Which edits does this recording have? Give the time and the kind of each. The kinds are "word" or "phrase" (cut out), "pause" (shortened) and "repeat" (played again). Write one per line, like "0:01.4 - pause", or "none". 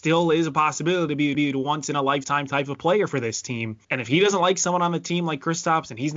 0:01.3 - repeat
0:03.8 - pause

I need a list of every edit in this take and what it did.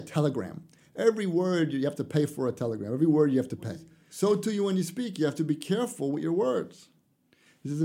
none

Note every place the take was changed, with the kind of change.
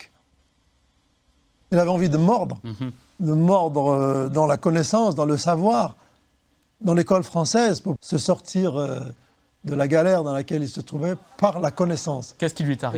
0:08.0 - phrase

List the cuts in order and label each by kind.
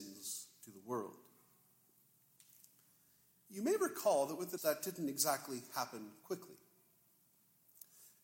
0:04.6 - word

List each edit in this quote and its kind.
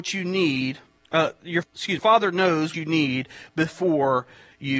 0:01.0 - pause
0:01.6 - word
0:02.0 - phrase
0:02.7 - word

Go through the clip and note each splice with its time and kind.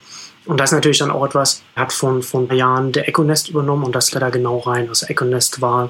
0:01.8 - word
0:02.5 - word
0:04.1 - word

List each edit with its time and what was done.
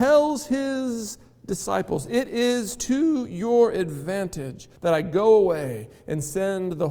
0:04.8 - pause

